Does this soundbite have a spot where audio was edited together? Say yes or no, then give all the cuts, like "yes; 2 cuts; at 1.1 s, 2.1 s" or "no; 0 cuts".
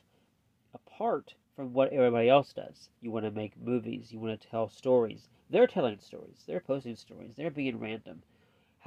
yes; 2 cuts; at 1.4 s, 3.0 s